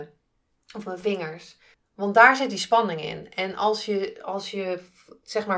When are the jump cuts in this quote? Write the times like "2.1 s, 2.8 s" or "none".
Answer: 1.7 s